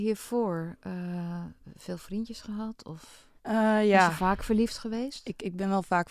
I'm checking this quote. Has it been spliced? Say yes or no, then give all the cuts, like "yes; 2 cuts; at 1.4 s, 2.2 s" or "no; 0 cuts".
yes; 1 cut; at 3.4 s